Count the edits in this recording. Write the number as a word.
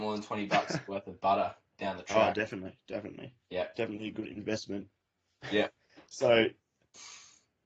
zero